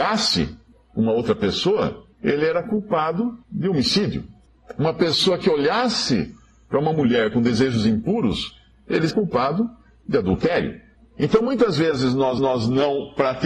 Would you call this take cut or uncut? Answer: cut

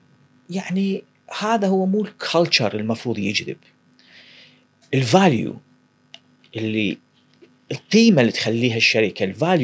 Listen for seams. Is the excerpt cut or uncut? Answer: uncut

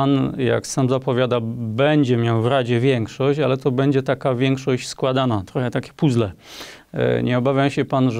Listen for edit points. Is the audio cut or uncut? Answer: uncut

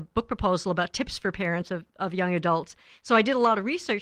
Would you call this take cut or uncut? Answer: uncut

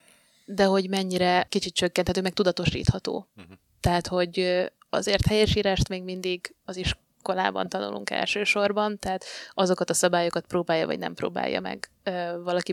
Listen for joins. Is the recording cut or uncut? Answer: cut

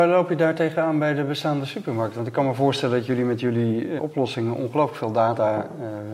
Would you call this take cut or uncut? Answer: cut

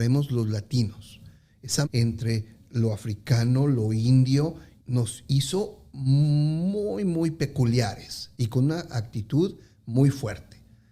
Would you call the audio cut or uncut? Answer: cut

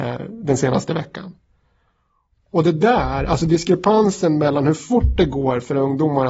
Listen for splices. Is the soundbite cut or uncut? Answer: uncut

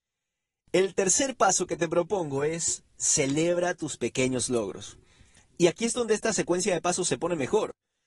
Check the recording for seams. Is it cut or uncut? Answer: uncut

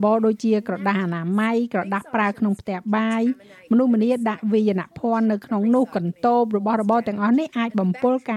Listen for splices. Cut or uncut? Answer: uncut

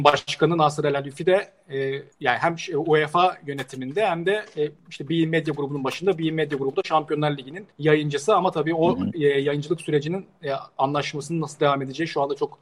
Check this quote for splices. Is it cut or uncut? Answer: cut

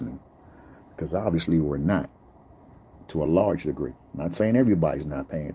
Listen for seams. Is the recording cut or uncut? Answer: uncut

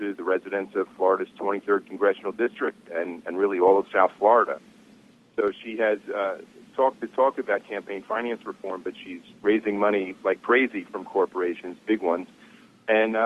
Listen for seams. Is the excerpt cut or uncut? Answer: uncut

